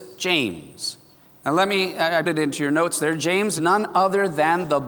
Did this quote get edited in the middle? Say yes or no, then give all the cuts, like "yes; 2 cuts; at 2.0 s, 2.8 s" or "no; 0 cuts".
yes; 3 cuts; at 1.2 s, 2.2 s, 3.6 s